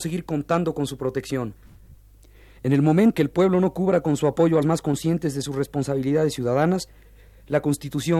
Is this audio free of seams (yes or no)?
no